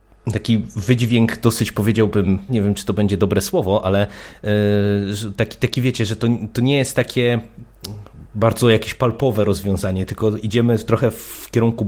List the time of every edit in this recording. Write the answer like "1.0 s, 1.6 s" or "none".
2.5 s